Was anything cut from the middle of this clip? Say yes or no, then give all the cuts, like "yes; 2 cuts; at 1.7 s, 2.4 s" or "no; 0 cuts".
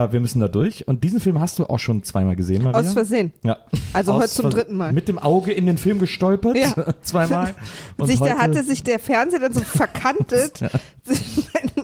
no; 0 cuts